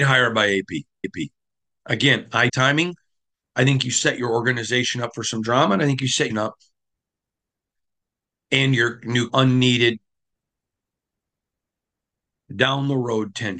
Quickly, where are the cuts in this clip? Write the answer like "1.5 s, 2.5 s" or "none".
1.0 s, 2.5 s, 6.3 s, 9.3 s